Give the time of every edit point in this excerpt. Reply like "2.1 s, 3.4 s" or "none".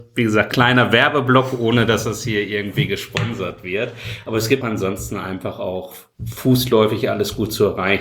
4.6 s